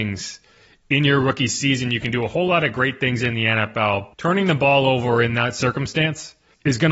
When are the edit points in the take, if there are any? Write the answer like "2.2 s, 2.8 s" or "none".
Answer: none